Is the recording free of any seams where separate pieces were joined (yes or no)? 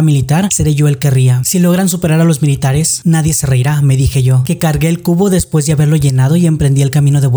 yes